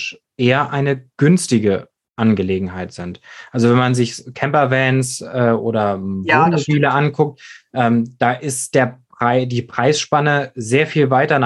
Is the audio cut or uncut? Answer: uncut